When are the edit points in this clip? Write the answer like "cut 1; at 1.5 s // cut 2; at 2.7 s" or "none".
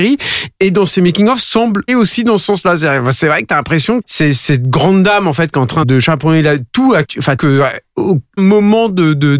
cut 1; at 1.9 s // cut 2; at 4.0 s // cut 3; at 5.8 s // cut 4; at 7.0 s // cut 5; at 7.4 s // cut 6; at 8.4 s